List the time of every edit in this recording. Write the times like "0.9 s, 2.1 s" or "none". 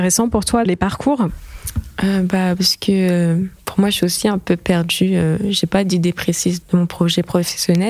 6.6 s